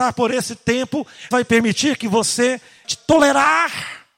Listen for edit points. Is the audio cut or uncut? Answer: cut